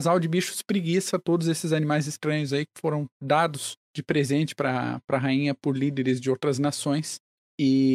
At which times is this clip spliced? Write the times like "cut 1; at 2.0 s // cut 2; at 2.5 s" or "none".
cut 1; at 3.8 s